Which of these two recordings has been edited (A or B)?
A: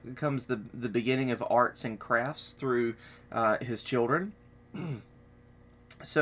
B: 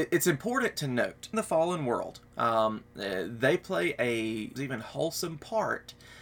B